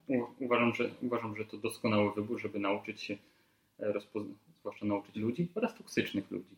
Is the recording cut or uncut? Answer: cut